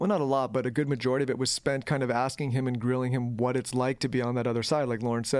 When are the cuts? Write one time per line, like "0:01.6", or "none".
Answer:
none